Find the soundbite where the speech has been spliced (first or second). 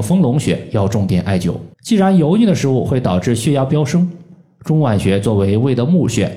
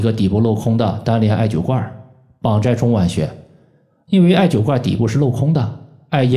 first